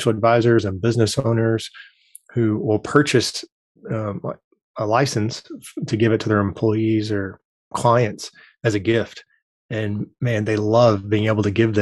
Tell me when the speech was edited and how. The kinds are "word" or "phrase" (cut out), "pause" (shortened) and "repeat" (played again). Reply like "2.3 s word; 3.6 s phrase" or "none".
7.7 s word